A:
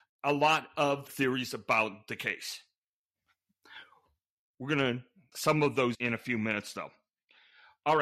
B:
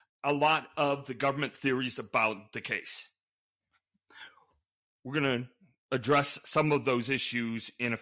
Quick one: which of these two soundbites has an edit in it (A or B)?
A